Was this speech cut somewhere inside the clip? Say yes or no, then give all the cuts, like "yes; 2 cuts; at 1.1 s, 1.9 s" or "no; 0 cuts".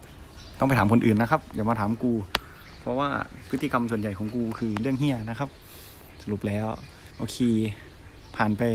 yes; 1 cut; at 7.1 s